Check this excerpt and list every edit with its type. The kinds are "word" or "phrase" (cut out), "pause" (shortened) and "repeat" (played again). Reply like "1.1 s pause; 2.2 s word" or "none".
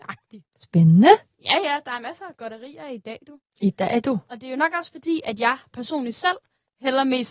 none